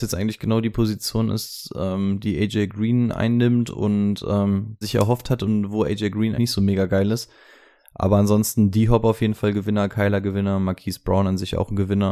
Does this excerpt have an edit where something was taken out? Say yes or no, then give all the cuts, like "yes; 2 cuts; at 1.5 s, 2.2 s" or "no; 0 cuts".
yes; 2 cuts; at 4.8 s, 6.4 s